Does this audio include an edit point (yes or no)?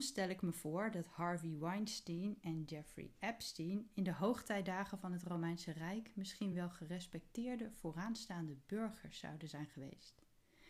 no